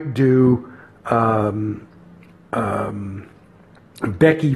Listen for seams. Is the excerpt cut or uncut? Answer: uncut